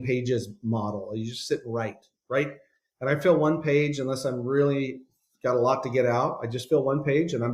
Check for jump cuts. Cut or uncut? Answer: cut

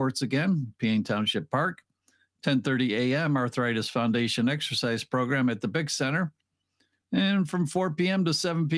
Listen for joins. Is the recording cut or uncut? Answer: uncut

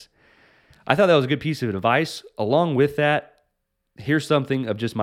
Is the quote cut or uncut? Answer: uncut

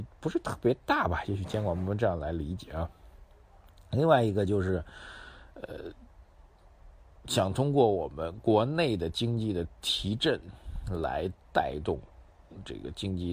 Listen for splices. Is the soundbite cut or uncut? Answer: uncut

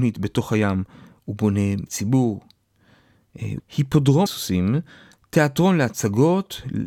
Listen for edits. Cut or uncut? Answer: cut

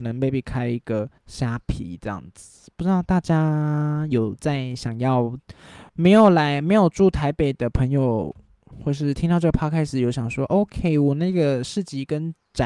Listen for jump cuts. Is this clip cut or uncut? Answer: cut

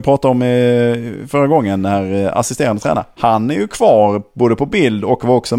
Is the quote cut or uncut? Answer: uncut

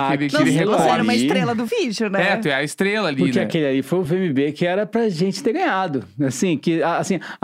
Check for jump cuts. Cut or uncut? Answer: uncut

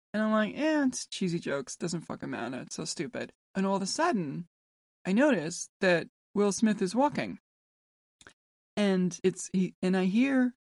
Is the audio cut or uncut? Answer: cut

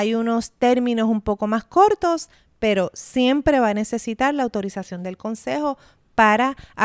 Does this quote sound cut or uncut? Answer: uncut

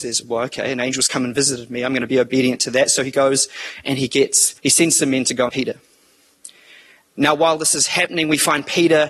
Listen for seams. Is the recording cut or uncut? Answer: cut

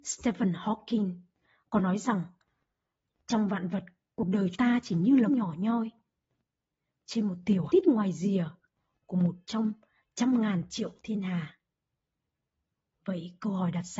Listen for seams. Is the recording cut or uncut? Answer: cut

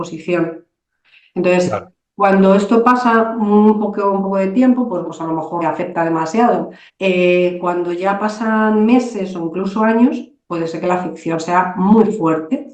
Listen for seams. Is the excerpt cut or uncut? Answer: cut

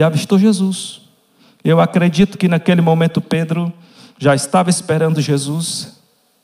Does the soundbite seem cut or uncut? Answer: uncut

